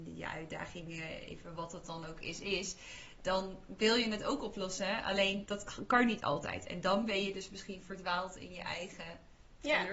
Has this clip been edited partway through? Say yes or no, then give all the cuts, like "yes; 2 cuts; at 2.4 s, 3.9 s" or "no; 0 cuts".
no; 0 cuts